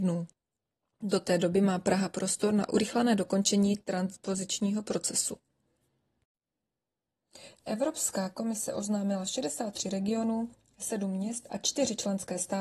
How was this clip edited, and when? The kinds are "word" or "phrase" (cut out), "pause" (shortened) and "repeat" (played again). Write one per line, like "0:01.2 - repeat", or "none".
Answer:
none